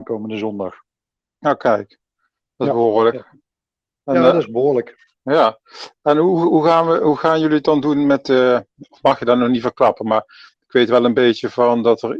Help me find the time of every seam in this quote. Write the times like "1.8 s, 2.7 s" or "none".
none